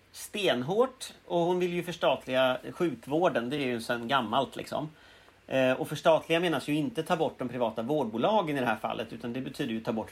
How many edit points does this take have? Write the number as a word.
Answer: zero